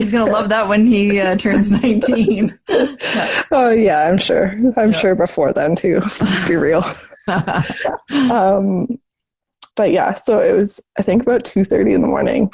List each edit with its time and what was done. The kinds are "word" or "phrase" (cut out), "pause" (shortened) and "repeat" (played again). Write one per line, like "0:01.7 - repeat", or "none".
0:09.7 - pause